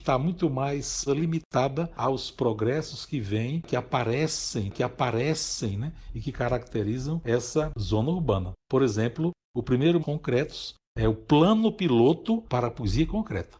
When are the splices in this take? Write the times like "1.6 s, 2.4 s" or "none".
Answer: 1.1 s, 4.7 s, 8.6 s, 10.0 s